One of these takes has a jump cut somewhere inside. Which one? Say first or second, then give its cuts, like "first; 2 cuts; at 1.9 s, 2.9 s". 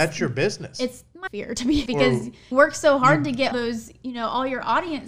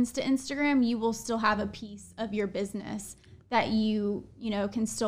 first; 4 cuts; at 1.3 s, 1.9 s, 2.5 s, 3.5 s